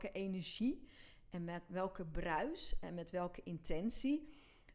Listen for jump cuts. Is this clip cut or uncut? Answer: uncut